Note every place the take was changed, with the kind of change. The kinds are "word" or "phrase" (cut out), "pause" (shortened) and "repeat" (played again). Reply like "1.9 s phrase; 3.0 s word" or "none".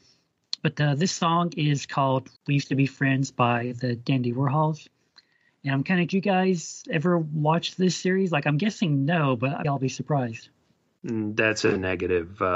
2.4 s pause; 6.1 s phrase; 9.6 s word